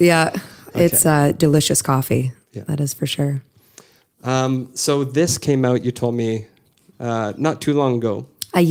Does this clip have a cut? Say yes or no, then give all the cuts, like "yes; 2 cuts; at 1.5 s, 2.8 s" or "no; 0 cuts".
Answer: no; 0 cuts